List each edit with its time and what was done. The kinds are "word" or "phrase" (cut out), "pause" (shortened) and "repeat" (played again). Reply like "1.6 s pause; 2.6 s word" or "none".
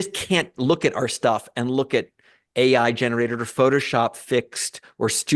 none